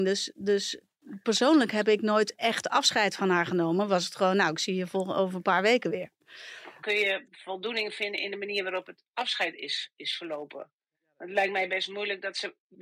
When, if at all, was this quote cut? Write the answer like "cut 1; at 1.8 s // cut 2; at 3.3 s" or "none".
none